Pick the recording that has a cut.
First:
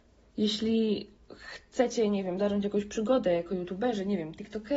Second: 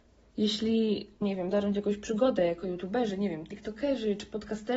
second; 1 cut; at 1.2 s

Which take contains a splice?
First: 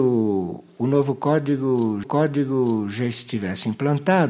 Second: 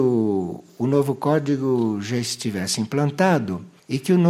first; 1 cut; at 2.0 s

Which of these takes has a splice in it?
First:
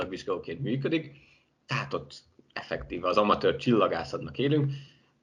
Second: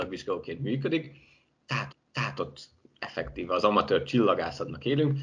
second; 1 cut; at 1.9 s

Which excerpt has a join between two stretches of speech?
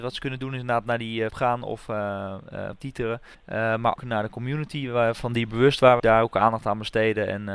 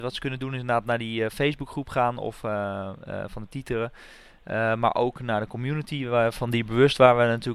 first; 5 cuts; at 1.3 s, 2.7 s, 3.3 s, 4.0 s, 6.0 s

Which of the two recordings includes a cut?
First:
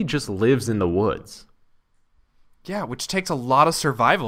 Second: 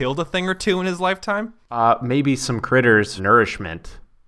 second; 2 cuts; at 1.6 s, 3.2 s

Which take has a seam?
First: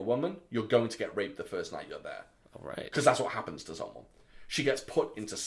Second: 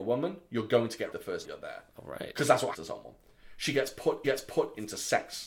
second; 5 cuts; at 1.1 s, 1.4 s, 1.9 s, 2.7 s, 4.2 s

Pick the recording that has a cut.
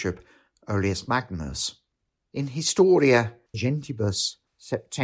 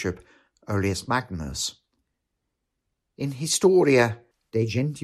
first; 2 cuts; at 1.9 s, 3.5 s

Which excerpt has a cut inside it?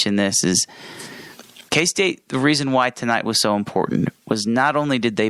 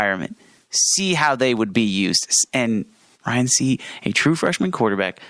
first; 1 cut; at 1.7 s

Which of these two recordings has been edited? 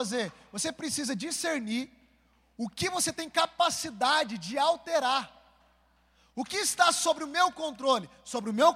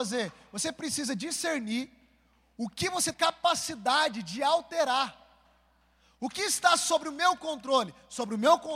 second; 1 cut; at 3.1 s

